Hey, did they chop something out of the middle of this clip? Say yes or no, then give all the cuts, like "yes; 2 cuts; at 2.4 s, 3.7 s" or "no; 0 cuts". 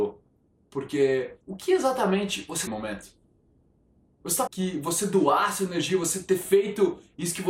yes; 3 cuts; at 1.4 s, 2.7 s, 4.5 s